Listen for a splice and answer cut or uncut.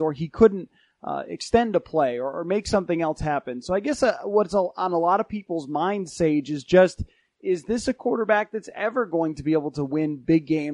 uncut